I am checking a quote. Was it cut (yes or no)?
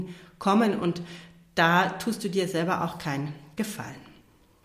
no